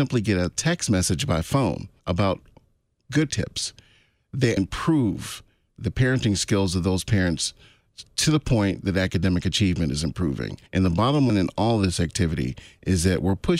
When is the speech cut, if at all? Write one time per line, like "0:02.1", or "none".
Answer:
0:02.0
0:03.3
0:04.6
0:10.7
0:11.3